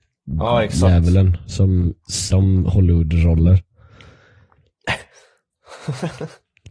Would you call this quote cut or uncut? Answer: cut